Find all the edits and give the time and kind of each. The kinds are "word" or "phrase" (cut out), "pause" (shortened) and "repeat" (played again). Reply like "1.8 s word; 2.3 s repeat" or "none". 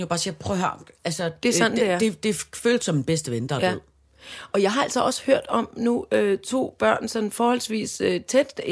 none